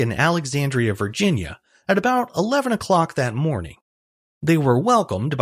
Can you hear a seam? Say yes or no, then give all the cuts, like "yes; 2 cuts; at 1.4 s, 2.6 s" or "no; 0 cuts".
no; 0 cuts